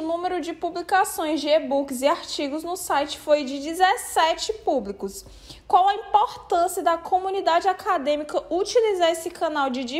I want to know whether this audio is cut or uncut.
uncut